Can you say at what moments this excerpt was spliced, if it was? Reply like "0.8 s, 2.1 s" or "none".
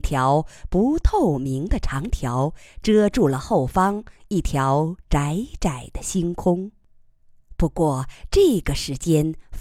none